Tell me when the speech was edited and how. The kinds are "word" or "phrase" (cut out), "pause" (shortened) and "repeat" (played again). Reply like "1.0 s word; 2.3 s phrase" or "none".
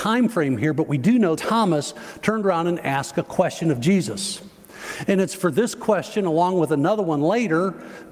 1.4 s word